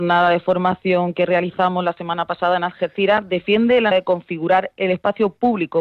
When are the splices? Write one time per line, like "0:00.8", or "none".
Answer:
0:03.9